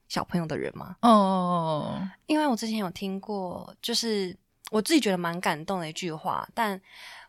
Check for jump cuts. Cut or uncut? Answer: cut